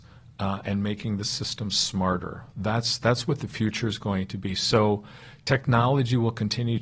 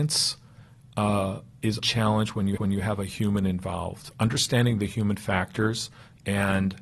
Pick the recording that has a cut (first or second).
second